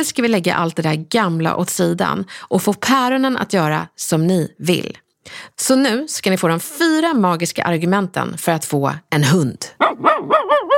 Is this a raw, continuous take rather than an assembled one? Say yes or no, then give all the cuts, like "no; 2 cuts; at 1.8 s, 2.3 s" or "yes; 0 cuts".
yes; 0 cuts